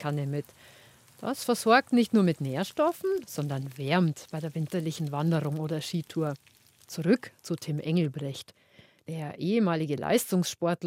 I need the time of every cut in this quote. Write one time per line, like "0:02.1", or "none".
none